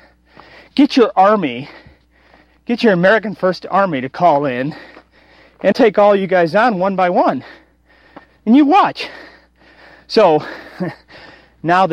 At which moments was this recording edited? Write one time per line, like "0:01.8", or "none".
0:05.7